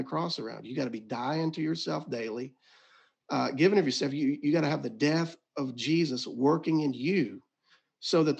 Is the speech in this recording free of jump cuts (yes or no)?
yes